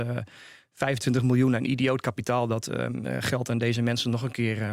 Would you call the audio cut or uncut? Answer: uncut